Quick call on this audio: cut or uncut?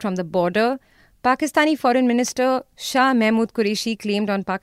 uncut